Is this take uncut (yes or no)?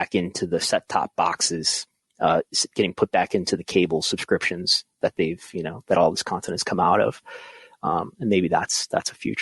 yes